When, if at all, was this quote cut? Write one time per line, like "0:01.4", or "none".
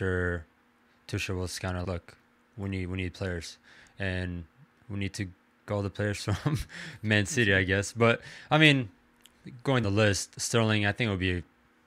0:01.8
0:05.7
0:09.8